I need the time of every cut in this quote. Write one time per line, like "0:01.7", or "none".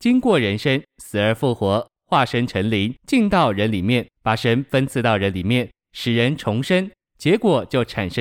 0:03.0
0:04.1